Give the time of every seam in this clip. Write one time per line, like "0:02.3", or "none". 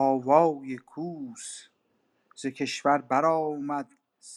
none